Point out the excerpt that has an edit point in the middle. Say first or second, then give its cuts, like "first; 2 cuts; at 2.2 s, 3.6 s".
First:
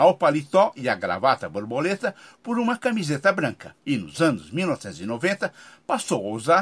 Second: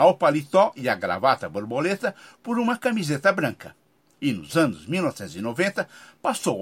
first; 1 cut; at 3.8 s